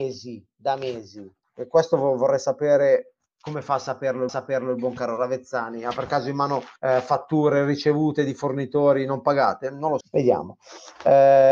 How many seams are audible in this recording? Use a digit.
4